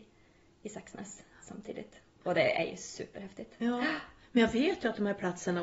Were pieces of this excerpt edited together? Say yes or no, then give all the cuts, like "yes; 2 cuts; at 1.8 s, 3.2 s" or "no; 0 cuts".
no; 0 cuts